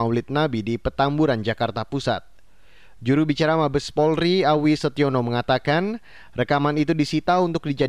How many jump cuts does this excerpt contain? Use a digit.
0